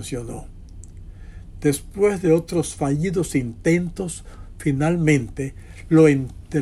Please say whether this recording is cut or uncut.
uncut